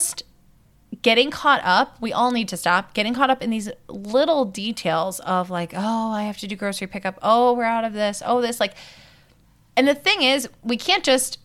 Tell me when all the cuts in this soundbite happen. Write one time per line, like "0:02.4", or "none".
none